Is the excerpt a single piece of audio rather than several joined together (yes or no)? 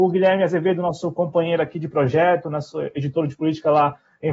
yes